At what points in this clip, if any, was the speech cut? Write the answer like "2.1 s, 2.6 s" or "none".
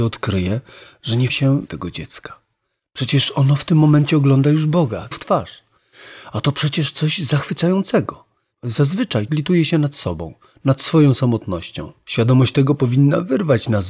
1.3 s, 1.7 s, 5.1 s, 9.3 s